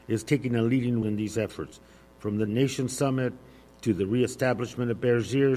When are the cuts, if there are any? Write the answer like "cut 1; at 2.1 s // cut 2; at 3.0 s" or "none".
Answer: cut 1; at 1.0 s // cut 2; at 2.5 s